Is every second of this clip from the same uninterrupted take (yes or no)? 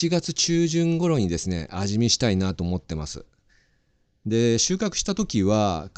yes